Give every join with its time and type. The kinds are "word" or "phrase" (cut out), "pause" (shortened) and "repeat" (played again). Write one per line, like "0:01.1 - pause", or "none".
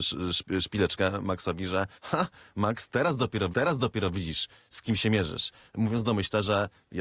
0:02.0 - pause
0:03.5 - repeat